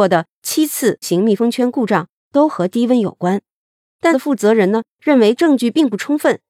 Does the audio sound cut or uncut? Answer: cut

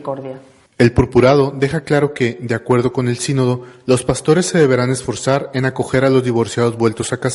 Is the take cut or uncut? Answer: uncut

